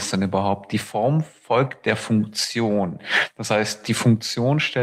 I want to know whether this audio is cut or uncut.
uncut